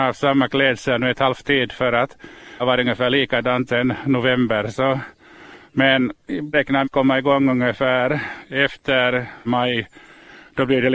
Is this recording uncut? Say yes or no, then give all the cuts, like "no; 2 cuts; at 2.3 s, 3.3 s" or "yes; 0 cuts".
no; 6 cuts; at 1.4 s, 2.6 s, 3.7 s, 6.5 s, 6.8 s, 9.5 s